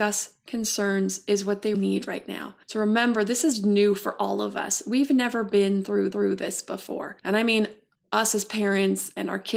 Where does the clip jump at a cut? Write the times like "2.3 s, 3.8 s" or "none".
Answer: 1.7 s, 2.6 s, 6.1 s, 7.2 s, 7.9 s